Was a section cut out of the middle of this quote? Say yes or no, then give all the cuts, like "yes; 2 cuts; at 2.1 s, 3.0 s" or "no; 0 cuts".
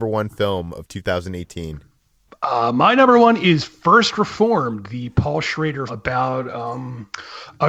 yes; 1 cut; at 5.9 s